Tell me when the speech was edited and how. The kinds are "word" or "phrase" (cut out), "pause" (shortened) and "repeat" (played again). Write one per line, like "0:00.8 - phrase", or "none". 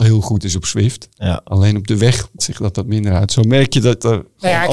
0:02.4 - word